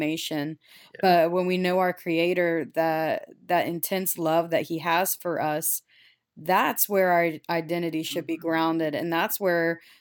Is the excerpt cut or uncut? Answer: uncut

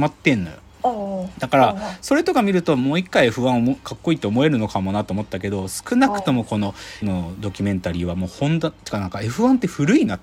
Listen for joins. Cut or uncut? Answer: cut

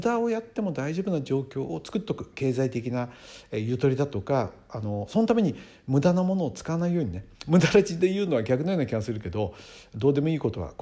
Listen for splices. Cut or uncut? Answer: cut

